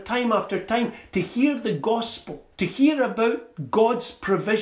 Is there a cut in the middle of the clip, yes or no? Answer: yes